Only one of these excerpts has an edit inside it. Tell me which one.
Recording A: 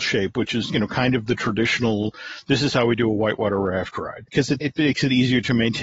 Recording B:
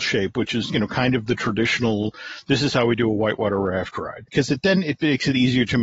A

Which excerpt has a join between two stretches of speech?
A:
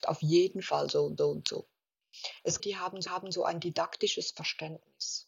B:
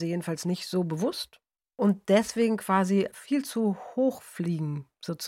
A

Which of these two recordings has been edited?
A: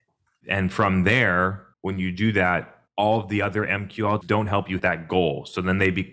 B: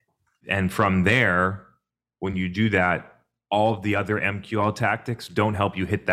A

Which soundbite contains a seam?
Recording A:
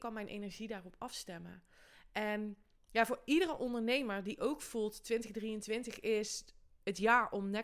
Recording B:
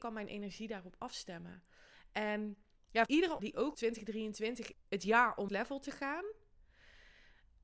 B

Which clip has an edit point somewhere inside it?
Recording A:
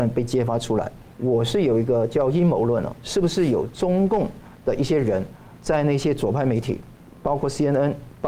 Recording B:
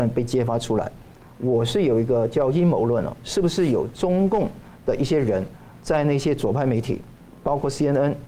A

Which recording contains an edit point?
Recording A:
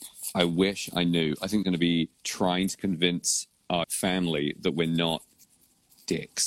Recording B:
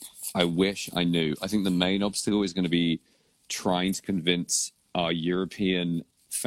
A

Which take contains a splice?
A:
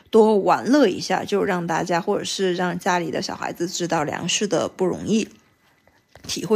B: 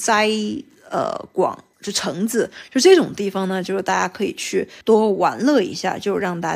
B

